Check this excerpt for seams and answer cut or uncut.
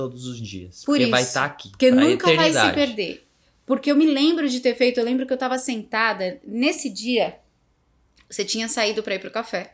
uncut